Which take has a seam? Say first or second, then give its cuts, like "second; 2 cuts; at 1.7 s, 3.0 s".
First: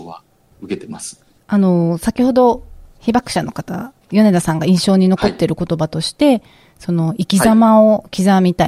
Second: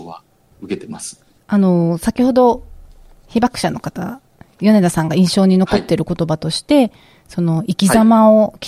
first; 2 cuts; at 2.9 s, 4.0 s